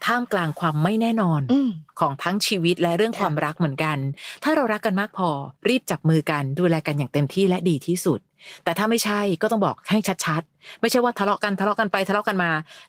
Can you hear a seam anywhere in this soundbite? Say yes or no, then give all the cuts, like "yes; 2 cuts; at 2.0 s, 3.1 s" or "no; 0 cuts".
yes; 1 cut; at 5.6 s